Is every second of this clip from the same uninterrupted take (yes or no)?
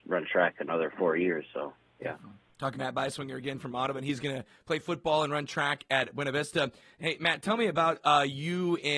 no